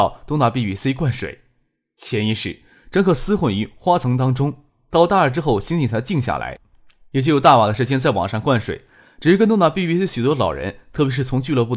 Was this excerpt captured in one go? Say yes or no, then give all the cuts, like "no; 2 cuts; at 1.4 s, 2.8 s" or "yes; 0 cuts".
yes; 0 cuts